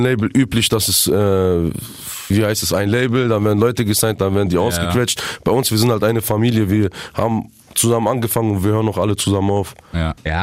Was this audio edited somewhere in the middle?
yes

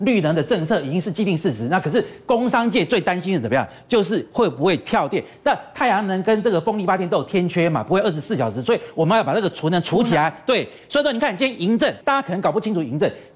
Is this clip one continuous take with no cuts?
no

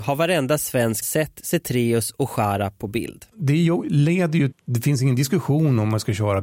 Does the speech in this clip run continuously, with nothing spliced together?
no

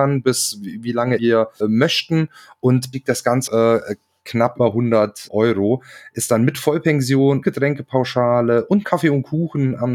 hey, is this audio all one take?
no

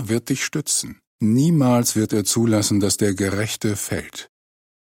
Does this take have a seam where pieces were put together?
yes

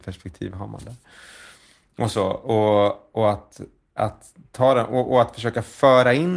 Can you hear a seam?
no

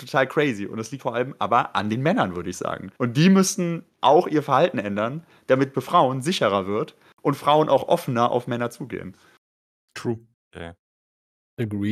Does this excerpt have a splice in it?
yes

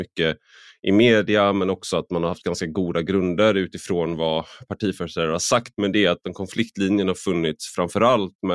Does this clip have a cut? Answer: no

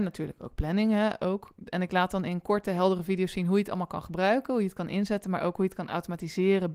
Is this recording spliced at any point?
no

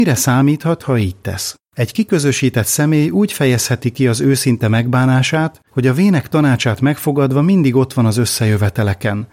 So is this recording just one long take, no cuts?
no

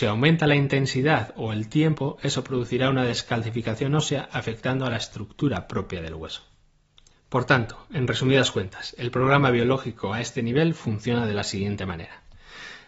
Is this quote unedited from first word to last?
yes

